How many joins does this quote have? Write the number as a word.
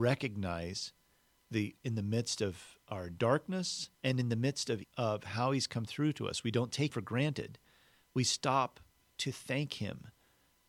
four